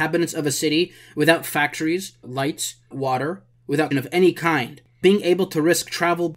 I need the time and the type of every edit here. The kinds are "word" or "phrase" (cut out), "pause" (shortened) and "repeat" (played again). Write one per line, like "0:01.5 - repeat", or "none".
0:02.2 - word
0:02.9 - word
0:03.9 - word
0:05.0 - word